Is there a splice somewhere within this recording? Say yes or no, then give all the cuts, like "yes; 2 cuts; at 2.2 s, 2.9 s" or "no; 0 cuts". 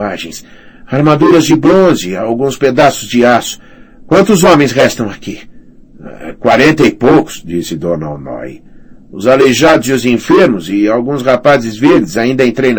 no; 0 cuts